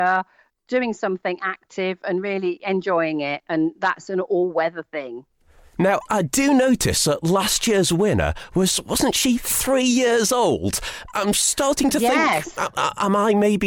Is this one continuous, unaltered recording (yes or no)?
yes